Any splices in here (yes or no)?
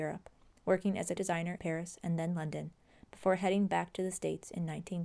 yes